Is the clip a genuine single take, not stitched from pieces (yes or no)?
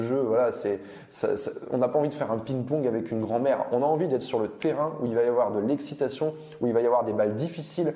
yes